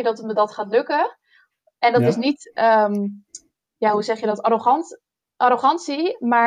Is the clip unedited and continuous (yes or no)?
yes